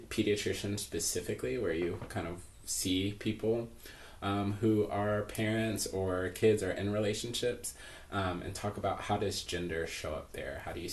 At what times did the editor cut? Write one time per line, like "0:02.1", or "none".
none